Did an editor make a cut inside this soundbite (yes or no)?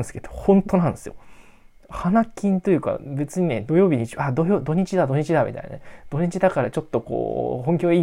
no